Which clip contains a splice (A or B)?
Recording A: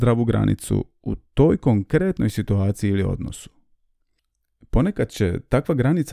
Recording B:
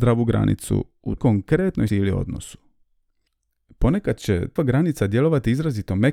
B